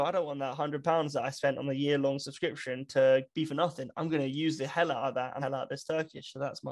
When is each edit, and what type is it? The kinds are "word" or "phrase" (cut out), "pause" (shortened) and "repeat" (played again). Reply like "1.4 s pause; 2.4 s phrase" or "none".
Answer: 5.4 s phrase